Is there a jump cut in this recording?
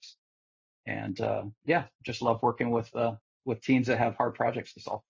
yes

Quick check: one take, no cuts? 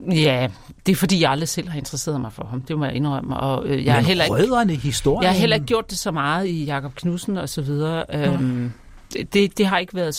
yes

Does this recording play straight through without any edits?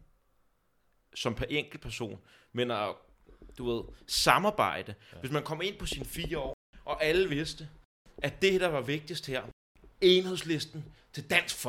yes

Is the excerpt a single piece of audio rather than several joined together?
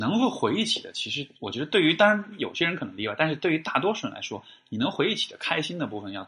no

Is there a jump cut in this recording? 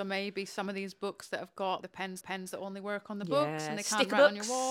yes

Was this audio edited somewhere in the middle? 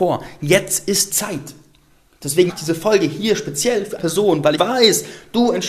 yes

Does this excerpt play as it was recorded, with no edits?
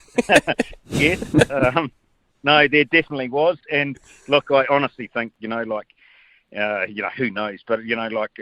yes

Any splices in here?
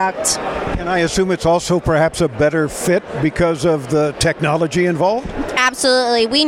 no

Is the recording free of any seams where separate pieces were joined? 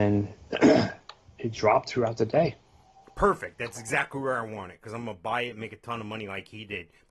yes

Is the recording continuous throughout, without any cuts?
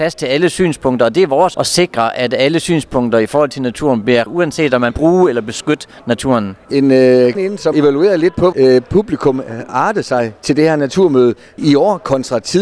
no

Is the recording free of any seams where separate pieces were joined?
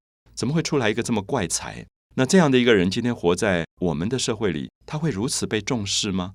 no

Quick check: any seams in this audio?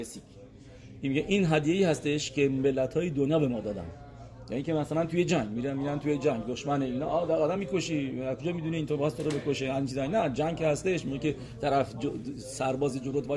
no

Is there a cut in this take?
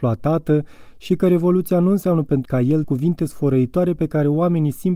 yes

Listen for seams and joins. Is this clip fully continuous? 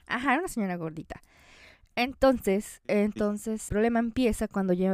no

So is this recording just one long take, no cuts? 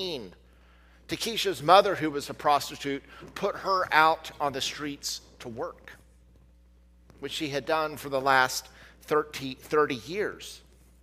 yes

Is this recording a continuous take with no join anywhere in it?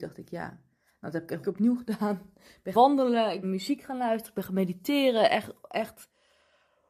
no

